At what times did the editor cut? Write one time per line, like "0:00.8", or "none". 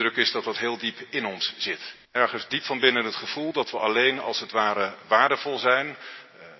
0:02.0